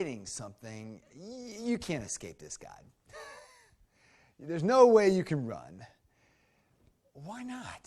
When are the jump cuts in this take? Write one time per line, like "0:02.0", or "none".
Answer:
none